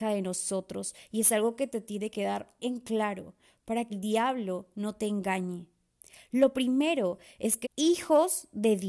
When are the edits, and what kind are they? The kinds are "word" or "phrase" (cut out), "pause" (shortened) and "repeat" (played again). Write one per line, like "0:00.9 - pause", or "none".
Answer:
0:02.1 - word
0:02.6 - word
0:03.9 - word
0:07.6 - word